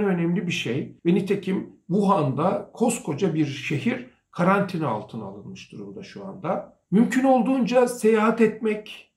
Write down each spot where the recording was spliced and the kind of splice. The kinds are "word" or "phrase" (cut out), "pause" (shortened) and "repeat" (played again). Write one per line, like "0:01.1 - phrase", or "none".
0:01.0 - pause